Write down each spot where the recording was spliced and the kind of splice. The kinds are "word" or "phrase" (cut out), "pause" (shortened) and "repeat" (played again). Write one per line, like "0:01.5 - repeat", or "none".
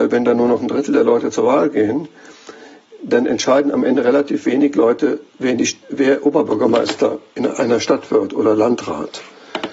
0:05.3 - pause